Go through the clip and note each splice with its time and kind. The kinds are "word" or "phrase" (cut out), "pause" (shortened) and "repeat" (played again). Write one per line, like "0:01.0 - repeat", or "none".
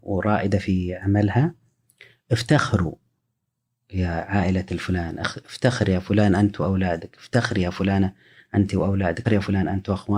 0:09.2 - word